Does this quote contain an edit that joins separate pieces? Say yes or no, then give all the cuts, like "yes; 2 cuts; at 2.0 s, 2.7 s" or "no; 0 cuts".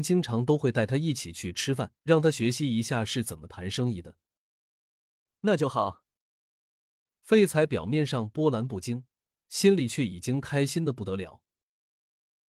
yes; 1 cut; at 2.0 s